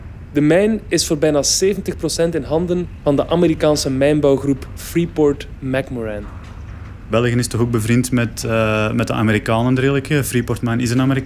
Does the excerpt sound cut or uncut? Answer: uncut